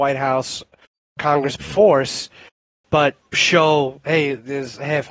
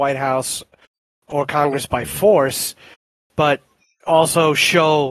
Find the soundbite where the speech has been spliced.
first; 3 cuts; at 1.2 s, 1.6 s, 3.3 s

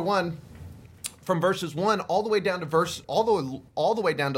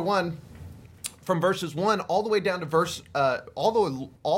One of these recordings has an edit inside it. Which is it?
first; 1 cut; at 3.0 s

